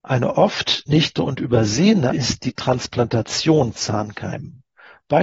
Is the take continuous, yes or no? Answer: no